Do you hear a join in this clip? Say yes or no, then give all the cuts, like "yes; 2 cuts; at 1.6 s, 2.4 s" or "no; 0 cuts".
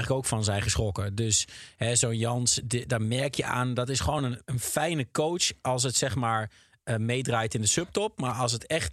no; 0 cuts